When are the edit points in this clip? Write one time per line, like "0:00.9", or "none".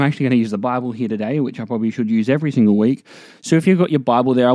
none